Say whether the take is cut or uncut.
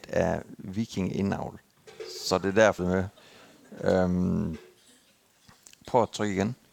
cut